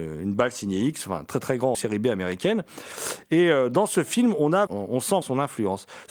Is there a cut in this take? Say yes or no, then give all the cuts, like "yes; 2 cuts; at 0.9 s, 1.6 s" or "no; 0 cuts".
yes; 3 cuts; at 1.7 s, 4.7 s, 5.2 s